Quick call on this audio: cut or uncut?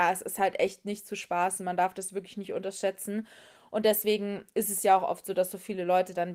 uncut